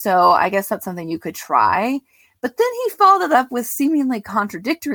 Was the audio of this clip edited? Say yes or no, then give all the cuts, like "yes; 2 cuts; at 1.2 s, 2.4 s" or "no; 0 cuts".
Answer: no; 0 cuts